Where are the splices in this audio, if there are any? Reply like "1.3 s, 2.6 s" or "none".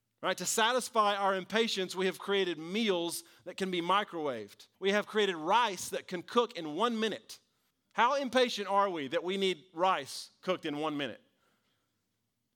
4.7 s, 7.7 s